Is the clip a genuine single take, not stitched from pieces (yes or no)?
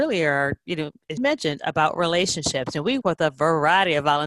no